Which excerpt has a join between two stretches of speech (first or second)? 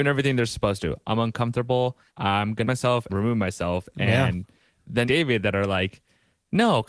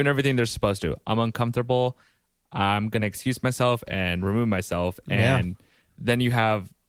first